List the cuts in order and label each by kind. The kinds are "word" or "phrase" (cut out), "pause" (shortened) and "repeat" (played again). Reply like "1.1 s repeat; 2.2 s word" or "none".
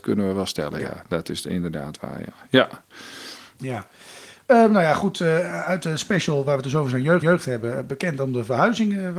7.2 s repeat